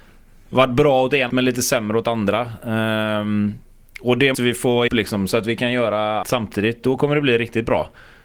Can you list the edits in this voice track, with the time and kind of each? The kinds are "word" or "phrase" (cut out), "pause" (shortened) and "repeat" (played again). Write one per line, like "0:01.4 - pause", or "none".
0:01.3 - word
0:04.3 - word
0:04.9 - word
0:06.2 - word